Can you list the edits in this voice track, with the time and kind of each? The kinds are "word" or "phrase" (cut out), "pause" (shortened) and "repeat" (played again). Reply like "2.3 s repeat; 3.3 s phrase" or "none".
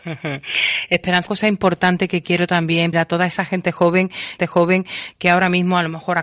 1.3 s word; 2.9 s phrase; 4.4 s repeat